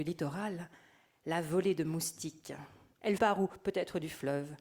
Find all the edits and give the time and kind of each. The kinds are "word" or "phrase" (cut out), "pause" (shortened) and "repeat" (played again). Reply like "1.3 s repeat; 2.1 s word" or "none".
3.2 s phrase